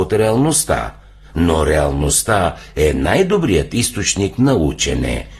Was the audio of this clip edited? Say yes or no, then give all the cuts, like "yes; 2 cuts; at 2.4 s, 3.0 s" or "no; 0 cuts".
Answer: no; 0 cuts